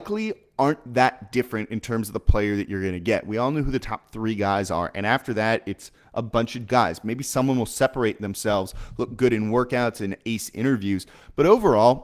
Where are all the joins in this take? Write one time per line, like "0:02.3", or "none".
0:06.7

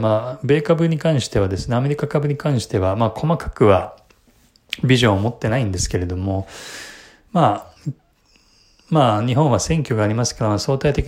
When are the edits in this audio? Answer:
0:07.8

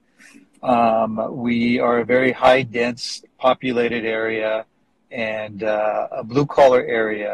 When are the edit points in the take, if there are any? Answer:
none

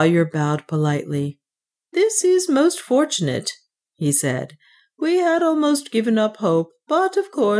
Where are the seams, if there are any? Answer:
none

